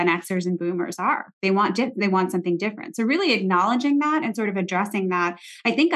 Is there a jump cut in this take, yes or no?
no